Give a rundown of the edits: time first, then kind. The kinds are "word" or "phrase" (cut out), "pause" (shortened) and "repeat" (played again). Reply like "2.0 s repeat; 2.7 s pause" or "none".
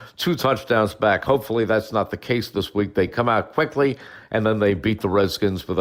none

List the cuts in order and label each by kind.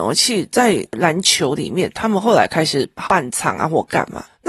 3.1 s word

